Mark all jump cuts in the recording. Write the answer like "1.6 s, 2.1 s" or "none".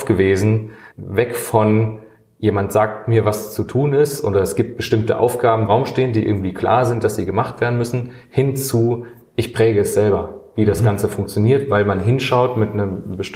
0.9 s, 5.7 s